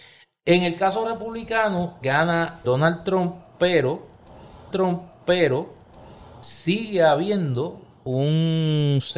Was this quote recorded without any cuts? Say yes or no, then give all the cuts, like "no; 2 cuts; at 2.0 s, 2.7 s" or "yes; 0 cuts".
no; 3 cuts; at 2.0 s, 2.6 s, 4.7 s